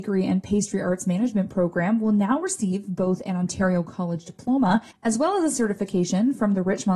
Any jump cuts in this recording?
no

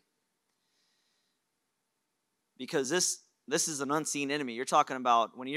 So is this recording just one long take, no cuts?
yes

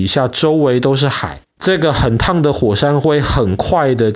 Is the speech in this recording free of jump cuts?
no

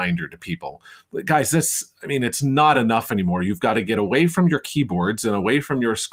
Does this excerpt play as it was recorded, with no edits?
yes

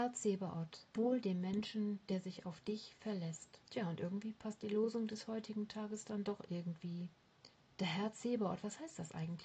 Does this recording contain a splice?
yes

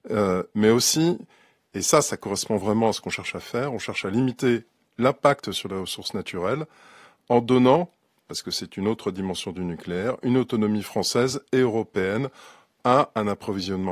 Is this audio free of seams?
yes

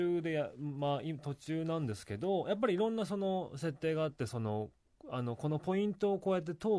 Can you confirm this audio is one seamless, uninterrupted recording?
yes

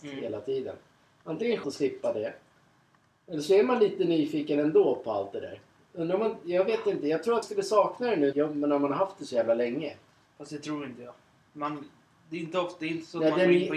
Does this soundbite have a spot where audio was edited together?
yes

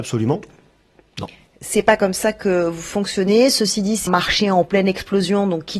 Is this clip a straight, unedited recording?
no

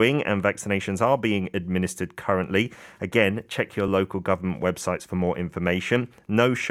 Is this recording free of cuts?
yes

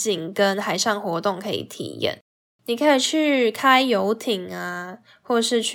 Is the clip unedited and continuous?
yes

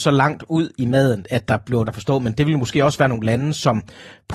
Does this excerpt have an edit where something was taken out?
yes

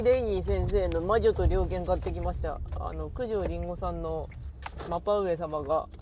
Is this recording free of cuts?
yes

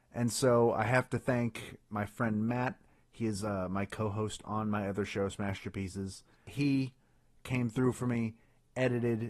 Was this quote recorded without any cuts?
yes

